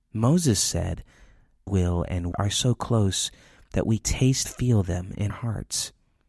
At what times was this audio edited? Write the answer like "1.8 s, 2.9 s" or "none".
1.7 s, 2.3 s, 4.0 s, 4.4 s, 5.3 s